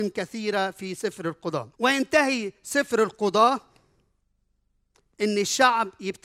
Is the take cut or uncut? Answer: cut